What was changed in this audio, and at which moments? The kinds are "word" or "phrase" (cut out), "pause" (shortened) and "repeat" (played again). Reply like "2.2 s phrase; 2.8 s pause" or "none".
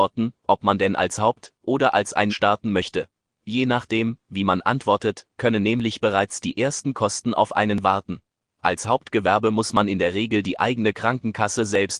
2.3 s word